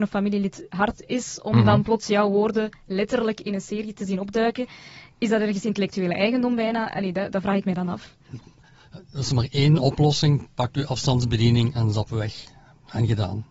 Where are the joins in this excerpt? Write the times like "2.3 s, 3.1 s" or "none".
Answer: none